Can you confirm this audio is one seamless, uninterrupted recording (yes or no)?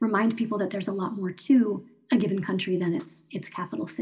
yes